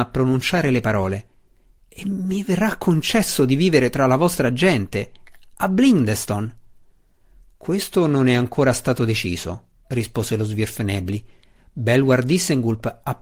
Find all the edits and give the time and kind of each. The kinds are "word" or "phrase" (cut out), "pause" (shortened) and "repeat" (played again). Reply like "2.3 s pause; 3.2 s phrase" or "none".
none